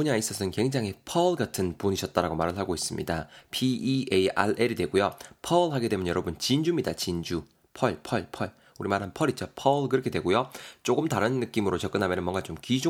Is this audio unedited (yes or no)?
yes